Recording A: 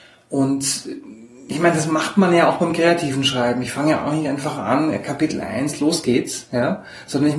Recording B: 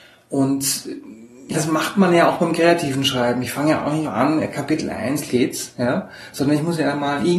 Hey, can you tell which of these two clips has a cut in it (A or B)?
B